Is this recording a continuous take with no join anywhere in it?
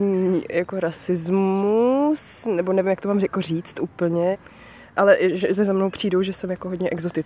yes; 0 cuts

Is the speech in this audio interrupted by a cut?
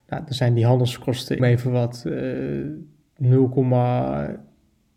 yes; 1 cut; at 1.4 s

